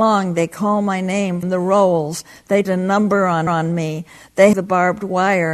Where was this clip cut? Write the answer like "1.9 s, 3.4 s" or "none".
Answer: 1.4 s, 2.6 s, 3.5 s, 4.5 s